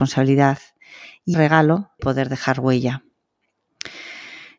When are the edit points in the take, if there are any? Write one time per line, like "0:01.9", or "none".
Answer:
0:01.3
0:02.0